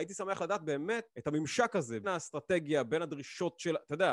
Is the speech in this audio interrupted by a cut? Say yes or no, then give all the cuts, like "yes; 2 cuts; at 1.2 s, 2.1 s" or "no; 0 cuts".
yes; 2 cuts; at 1.1 s, 2.0 s